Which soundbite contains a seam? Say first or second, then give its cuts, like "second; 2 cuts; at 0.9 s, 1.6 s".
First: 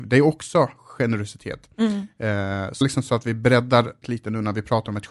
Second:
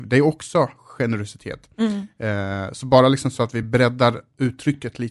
first; 2 cuts; at 2.8 s, 4.0 s